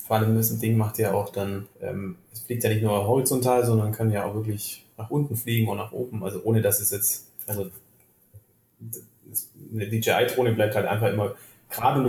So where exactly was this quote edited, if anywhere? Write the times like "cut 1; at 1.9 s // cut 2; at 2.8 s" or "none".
cut 1; at 1.7 s // cut 2; at 4.9 s